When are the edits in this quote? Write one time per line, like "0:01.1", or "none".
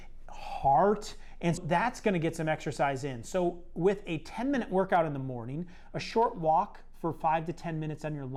0:01.6